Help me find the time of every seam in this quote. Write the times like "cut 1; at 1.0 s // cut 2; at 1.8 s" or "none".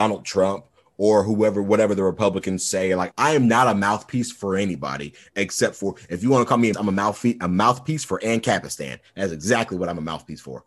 cut 1; at 3.1 s // cut 2; at 6.7 s